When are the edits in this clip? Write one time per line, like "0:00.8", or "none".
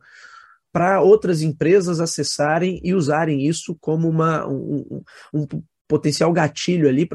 none